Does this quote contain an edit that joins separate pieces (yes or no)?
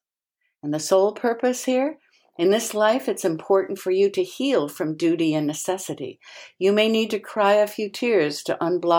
no